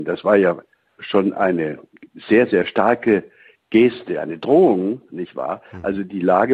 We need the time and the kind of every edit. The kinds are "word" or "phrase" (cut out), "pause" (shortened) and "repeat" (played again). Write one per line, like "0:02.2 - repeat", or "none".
none